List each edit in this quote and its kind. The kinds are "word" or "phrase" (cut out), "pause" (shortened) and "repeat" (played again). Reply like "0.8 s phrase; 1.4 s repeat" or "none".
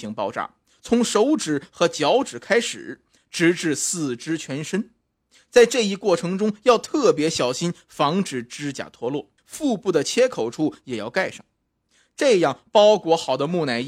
9.4 s pause

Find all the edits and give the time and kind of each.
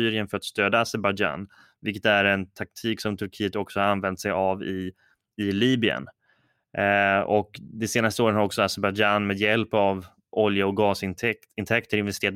none

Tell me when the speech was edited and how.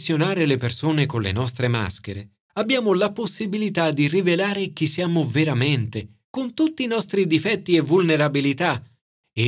2.4 s pause

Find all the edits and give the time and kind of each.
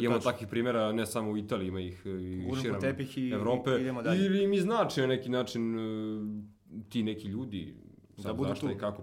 none

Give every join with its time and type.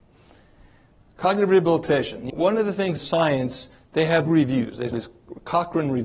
2.3 s word; 3.0 s word; 4.3 s phrase; 4.9 s word

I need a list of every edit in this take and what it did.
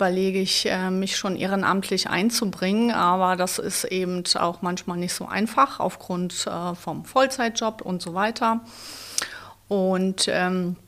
none

